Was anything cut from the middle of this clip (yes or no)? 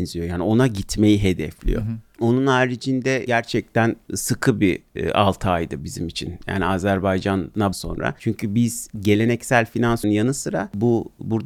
yes